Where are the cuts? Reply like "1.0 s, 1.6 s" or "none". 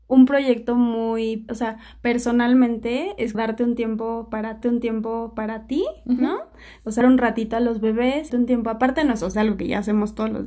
1.5 s, 3.3 s, 4.6 s, 7.0 s, 8.3 s, 9.3 s